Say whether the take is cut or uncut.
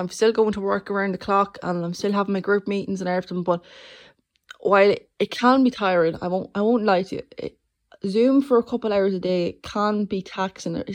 uncut